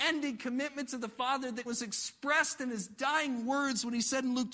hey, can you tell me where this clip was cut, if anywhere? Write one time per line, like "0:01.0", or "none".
0:01.7